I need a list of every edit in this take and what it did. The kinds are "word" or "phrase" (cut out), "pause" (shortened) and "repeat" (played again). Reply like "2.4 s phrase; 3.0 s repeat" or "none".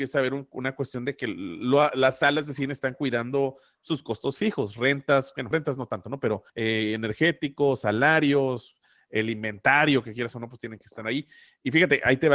5.5 s word; 6.5 s pause